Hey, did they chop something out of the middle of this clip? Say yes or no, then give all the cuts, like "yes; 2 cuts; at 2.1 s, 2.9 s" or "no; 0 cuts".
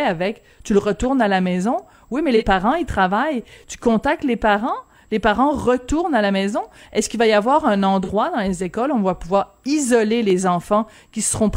no; 0 cuts